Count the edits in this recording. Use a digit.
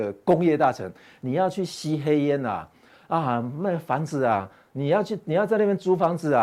0